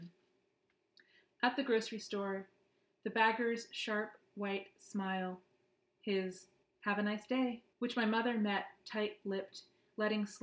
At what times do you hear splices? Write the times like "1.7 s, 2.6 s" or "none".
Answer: 6.6 s, 7.7 s

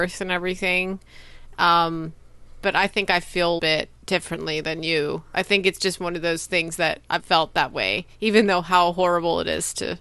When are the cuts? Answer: 3.6 s, 4.0 s, 7.2 s

